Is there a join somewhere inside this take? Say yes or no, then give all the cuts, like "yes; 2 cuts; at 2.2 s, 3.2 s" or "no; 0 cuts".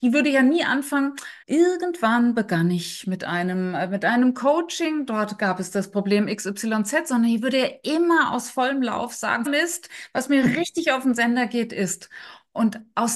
yes; 2 cuts; at 1.4 s, 9.5 s